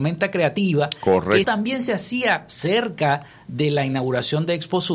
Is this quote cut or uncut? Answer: cut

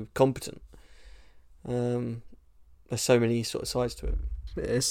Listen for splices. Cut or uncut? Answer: uncut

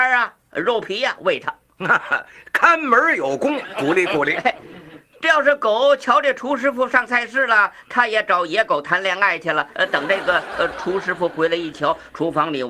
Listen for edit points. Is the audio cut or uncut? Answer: uncut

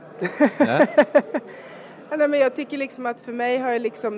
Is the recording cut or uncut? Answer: uncut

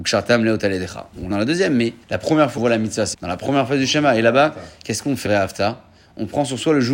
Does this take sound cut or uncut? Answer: cut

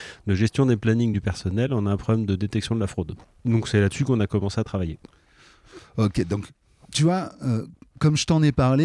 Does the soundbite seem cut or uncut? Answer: uncut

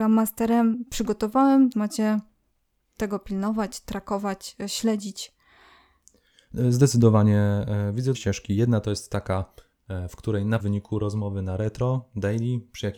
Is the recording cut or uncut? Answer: cut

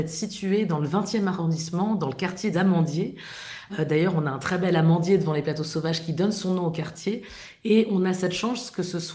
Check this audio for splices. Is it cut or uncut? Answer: cut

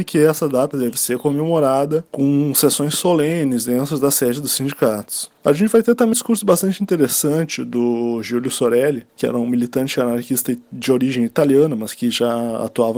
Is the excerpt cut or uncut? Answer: cut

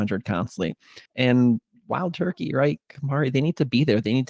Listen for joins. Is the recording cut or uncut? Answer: cut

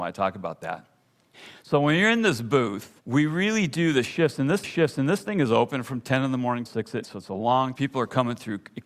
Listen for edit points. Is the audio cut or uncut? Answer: cut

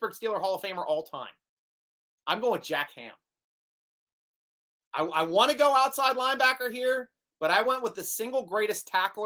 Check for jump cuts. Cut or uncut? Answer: uncut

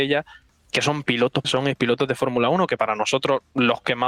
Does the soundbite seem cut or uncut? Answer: cut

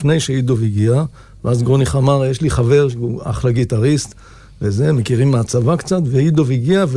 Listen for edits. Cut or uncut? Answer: uncut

